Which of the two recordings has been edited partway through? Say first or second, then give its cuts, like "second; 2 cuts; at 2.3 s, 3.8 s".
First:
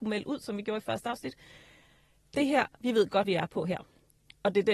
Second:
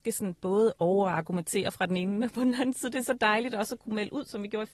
first; 1 cut; at 3.2 s